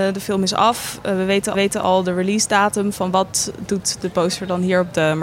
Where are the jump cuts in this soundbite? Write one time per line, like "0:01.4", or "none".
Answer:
0:01.5